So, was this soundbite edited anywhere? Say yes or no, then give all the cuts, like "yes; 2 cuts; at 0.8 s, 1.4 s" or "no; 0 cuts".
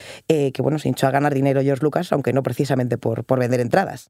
no; 0 cuts